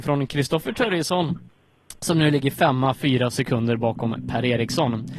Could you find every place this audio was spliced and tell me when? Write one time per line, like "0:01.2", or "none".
none